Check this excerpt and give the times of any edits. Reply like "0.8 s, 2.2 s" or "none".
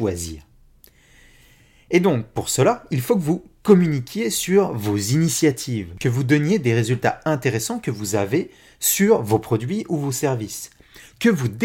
none